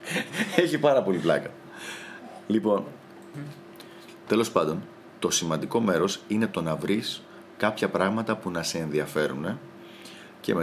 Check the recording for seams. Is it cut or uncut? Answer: uncut